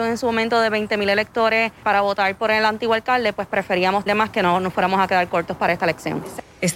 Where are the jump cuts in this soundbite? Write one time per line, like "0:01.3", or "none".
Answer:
0:01.8
0:04.1